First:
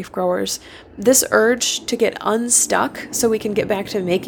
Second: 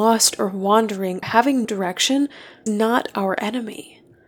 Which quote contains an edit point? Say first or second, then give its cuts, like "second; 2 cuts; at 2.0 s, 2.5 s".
second; 3 cuts; at 1.2 s, 1.6 s, 2.7 s